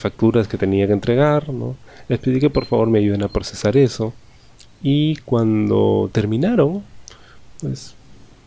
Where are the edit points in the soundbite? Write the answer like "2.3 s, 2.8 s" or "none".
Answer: 4.4 s